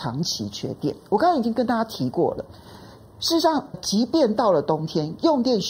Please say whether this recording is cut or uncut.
cut